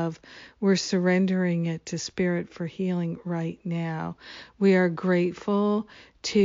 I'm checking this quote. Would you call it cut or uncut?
uncut